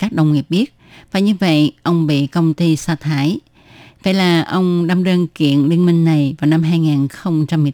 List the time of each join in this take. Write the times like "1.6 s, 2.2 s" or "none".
none